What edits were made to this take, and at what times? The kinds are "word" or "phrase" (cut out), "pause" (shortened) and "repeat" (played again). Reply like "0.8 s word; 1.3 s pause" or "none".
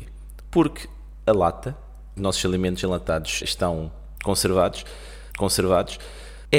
2.2 s phrase; 3.4 s word; 5.3 s repeat